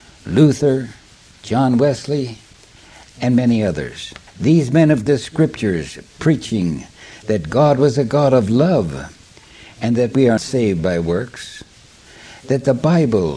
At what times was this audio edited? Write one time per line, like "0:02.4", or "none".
0:04.3
0:05.1
0:10.4